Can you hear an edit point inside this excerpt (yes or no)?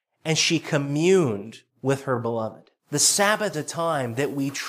yes